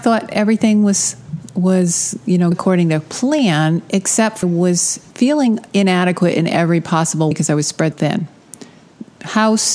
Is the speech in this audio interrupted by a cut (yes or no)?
yes